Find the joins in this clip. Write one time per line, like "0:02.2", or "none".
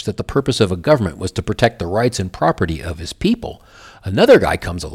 none